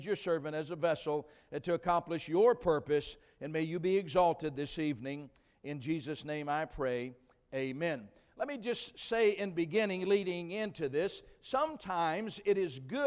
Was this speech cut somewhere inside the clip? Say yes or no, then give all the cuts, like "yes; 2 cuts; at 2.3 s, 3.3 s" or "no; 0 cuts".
no; 0 cuts